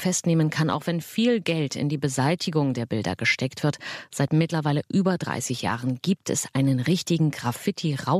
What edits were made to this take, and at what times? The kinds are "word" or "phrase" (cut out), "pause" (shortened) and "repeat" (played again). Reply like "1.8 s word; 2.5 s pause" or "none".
none